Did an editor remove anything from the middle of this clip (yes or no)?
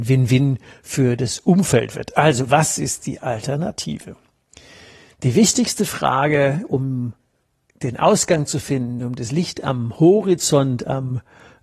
no